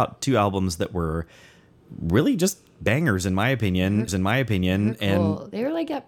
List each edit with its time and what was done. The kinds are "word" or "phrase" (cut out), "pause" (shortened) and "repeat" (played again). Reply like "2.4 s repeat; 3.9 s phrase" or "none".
4.1 s repeat